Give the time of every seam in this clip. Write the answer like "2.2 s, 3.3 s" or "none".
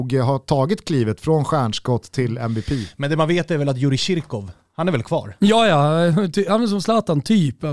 none

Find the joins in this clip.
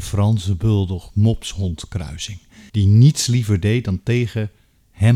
2.7 s

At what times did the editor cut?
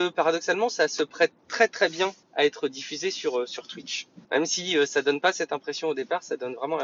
2.2 s, 4.2 s

